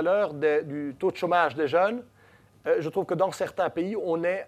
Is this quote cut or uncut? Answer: uncut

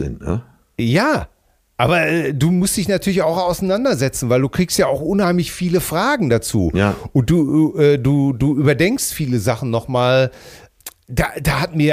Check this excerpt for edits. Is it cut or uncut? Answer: uncut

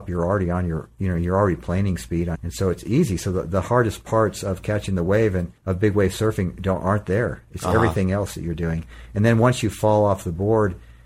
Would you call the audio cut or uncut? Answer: cut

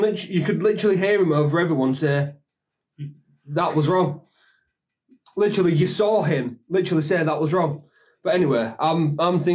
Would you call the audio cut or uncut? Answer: uncut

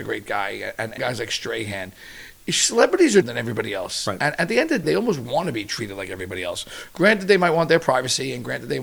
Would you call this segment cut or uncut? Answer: cut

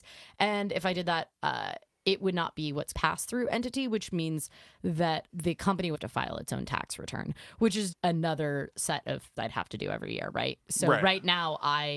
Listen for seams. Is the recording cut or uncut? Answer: cut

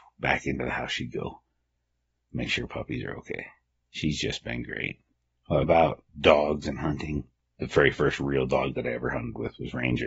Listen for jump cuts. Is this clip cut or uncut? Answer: cut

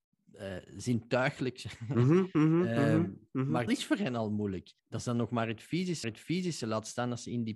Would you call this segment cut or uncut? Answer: cut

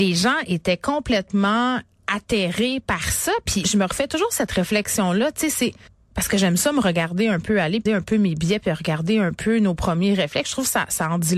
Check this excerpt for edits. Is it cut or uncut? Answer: cut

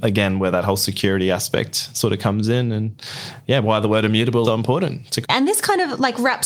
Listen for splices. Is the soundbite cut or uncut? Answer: cut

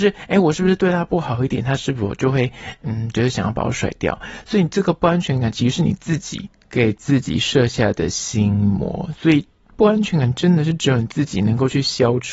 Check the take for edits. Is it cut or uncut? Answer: uncut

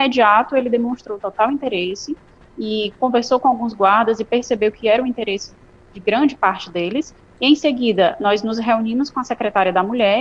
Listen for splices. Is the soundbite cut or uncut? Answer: uncut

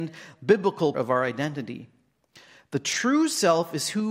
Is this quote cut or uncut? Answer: cut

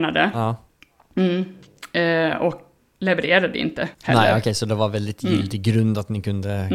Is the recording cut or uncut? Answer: cut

